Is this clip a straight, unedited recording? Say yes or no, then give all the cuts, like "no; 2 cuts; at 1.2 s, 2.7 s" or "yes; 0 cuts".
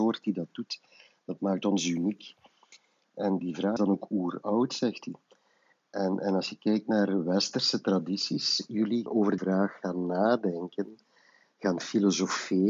no; 4 cuts; at 3.4 s, 3.8 s, 9.1 s, 9.4 s